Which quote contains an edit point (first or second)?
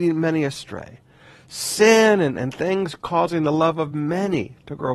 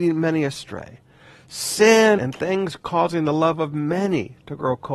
second